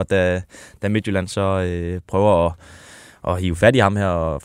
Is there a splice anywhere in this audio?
no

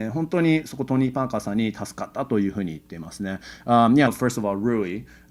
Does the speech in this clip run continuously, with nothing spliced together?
no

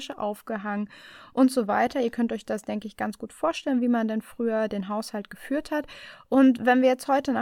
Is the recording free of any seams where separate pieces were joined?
yes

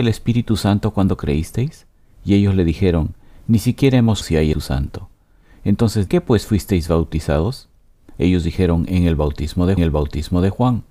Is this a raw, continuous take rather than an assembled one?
no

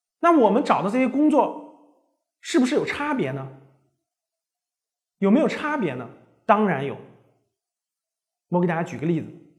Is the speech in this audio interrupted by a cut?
no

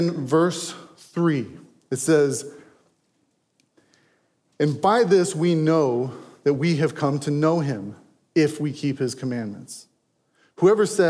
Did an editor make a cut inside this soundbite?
no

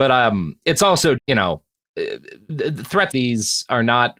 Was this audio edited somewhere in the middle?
yes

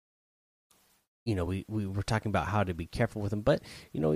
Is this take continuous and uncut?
yes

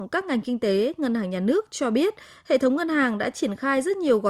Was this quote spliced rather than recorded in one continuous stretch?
no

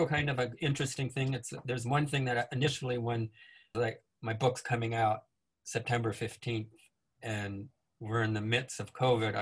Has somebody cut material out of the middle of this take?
no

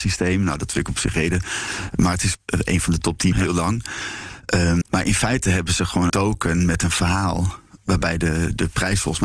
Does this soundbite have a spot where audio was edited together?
yes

